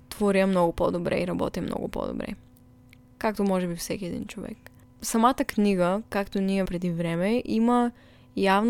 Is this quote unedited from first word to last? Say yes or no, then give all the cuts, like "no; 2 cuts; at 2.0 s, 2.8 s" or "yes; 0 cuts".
no; 1 cut; at 6.7 s